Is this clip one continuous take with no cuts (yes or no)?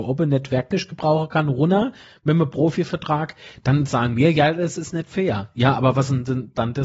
yes